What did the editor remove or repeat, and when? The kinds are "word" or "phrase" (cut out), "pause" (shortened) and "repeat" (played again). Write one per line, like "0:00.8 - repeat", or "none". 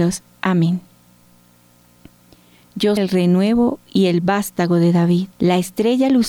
0:03.0 - word
0:05.3 - pause